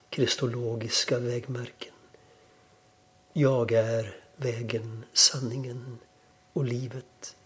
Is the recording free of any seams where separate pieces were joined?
yes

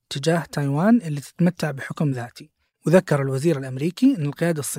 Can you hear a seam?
no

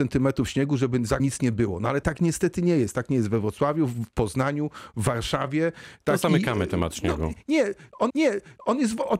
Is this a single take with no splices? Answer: no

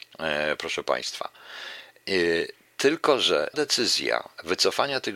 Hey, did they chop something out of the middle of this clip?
yes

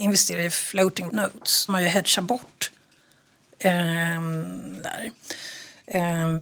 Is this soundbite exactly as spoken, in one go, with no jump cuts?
no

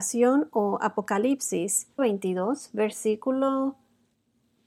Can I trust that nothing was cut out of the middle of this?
no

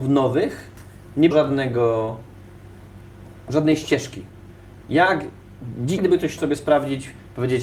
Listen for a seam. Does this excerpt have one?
yes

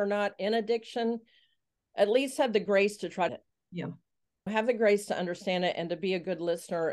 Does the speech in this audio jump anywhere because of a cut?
yes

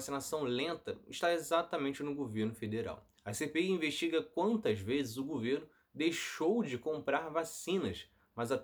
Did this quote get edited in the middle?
yes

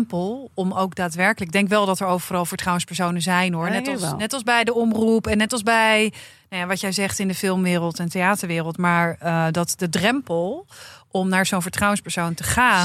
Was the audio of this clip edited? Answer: no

